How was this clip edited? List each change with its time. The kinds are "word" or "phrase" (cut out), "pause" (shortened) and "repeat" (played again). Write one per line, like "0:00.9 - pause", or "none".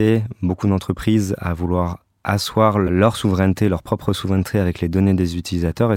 none